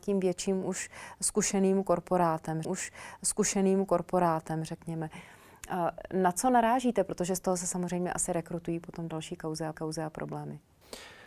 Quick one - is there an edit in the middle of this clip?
yes; 2 cuts; at 2.6 s, 9.7 s

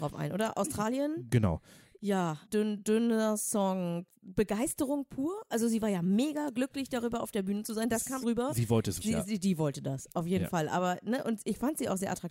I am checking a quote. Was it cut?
yes; 3 cuts; at 2.5 s, 8.2 s, 9.0 s

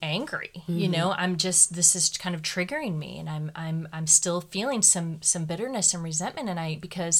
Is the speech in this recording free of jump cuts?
yes; 0 cuts

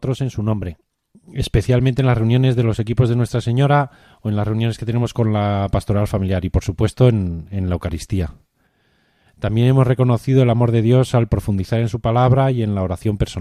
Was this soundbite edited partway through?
no; 0 cuts

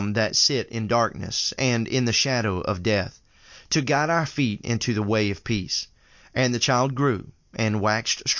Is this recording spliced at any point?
no; 0 cuts

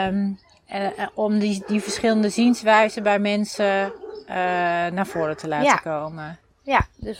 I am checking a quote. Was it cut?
no; 0 cuts

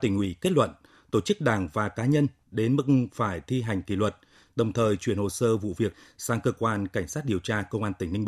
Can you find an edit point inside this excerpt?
no; 0 cuts

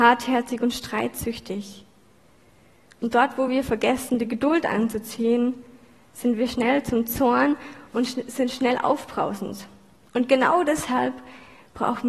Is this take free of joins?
yes; 0 cuts

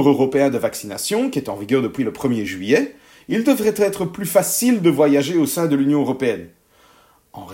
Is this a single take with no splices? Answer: yes; 0 cuts

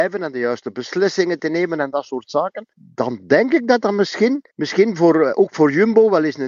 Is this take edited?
yes; 2 cuts; at 2.7 s, 4.5 s

